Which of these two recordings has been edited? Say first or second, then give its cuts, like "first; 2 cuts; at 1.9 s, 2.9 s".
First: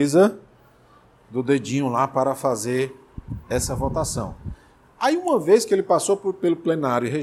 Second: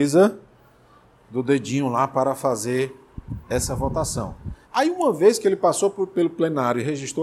second; 1 cut; at 4.6 s